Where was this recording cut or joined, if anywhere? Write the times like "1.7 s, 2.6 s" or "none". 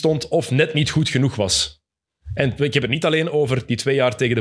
none

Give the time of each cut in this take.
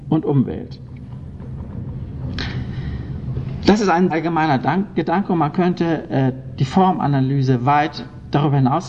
4.1 s

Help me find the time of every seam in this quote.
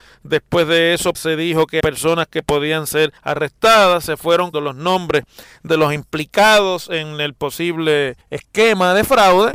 1.1 s, 1.8 s, 3.2 s, 4.5 s, 5.7 s, 8.2 s

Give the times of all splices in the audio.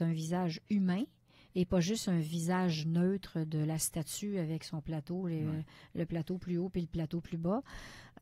none

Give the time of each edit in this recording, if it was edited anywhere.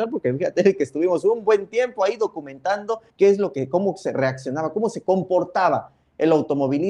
3.1 s

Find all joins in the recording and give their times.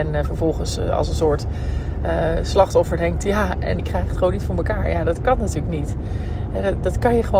3.8 s

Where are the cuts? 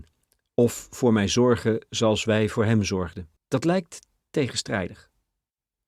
3.4 s

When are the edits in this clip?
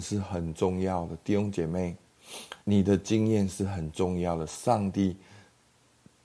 2.6 s

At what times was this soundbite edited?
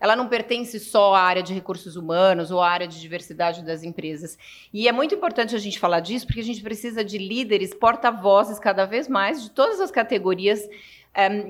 none

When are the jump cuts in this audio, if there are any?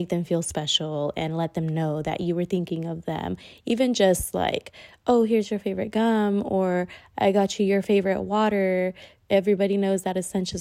none

